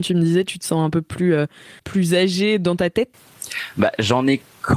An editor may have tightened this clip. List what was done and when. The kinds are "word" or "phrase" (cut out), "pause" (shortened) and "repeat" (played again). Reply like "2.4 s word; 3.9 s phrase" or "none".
1.8 s pause